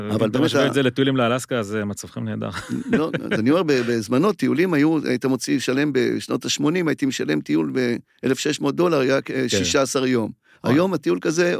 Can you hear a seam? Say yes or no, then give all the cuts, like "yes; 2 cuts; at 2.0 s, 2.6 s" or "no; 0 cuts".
no; 0 cuts